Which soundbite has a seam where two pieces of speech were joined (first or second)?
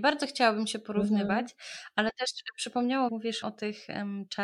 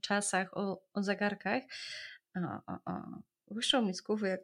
first